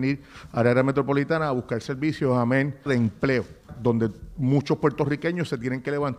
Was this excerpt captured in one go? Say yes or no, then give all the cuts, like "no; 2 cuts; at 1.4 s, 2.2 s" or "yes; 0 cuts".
no; 2 cuts; at 2.9 s, 3.7 s